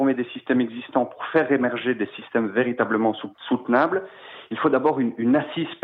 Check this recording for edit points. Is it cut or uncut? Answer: cut